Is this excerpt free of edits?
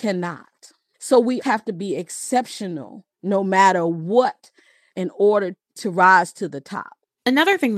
no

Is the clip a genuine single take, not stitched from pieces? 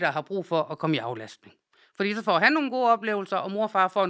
yes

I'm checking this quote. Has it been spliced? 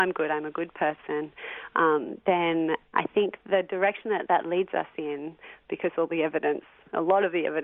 no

